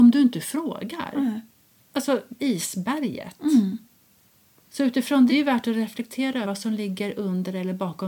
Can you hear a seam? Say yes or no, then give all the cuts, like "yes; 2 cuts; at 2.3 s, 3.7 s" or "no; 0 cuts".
yes; 3 cuts; at 2.4 s, 5.3 s, 6.4 s